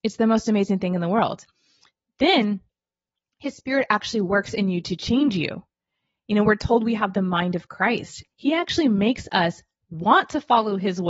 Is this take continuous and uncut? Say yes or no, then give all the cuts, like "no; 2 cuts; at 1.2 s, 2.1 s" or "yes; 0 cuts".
yes; 0 cuts